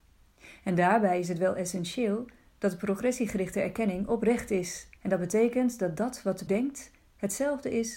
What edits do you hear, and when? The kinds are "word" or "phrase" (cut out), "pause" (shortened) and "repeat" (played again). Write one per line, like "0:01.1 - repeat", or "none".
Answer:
0:05.0 - pause
0:06.5 - word